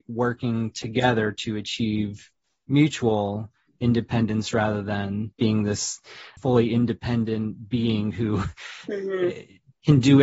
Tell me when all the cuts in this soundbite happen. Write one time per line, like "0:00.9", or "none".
none